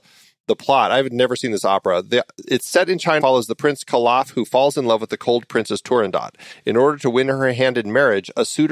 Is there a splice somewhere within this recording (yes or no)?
yes